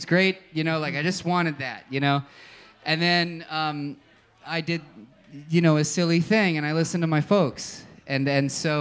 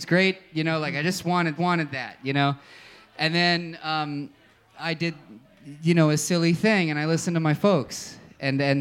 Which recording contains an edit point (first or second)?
second